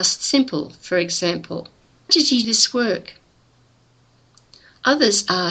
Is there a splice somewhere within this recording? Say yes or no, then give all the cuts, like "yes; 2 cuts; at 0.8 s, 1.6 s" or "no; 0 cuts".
yes; 2 cuts; at 2.1 s, 2.4 s